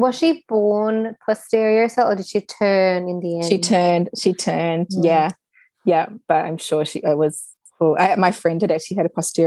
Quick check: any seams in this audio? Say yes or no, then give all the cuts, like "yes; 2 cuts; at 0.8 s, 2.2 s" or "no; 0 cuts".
yes; 1 cut; at 7.6 s